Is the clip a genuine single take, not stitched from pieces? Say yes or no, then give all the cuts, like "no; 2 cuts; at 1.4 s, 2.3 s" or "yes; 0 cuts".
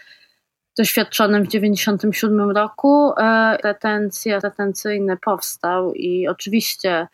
no; 2 cuts; at 3.6 s, 4.4 s